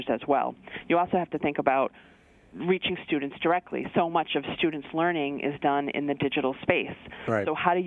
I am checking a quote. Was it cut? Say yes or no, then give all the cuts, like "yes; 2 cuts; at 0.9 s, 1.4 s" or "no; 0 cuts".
no; 0 cuts